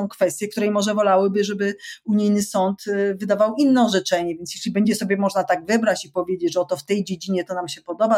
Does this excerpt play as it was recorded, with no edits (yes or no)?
yes